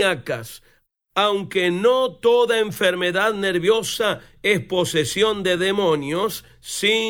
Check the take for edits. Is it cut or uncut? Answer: uncut